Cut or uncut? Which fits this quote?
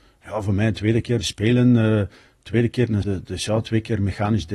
cut